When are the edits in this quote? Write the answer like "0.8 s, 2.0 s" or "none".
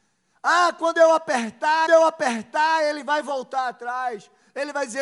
1.9 s

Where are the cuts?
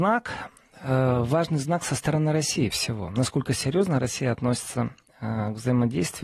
2.7 s

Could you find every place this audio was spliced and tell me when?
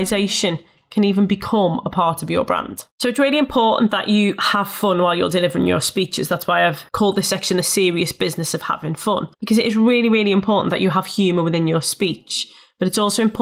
2.9 s, 6.9 s, 9.3 s

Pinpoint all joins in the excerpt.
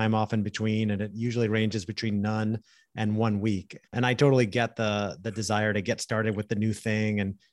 3.9 s

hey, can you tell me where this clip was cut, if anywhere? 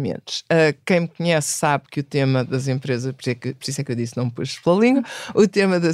none

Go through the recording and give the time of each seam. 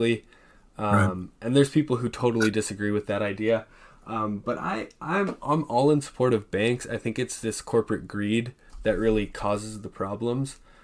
none

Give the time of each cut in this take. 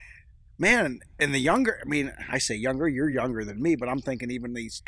none

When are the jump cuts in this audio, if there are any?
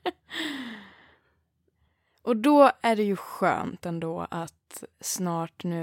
4.9 s

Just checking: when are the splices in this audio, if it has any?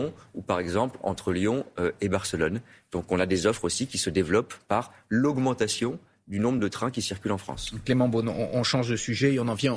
none

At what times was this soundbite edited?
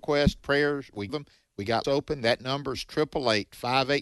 1.1 s, 1.8 s

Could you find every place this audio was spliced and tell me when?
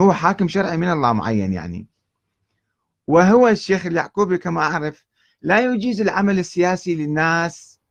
none

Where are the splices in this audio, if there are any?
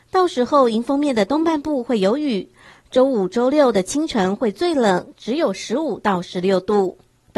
none

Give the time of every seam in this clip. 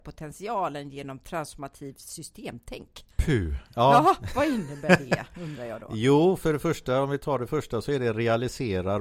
3.1 s

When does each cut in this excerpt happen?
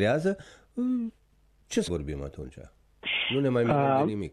1.9 s

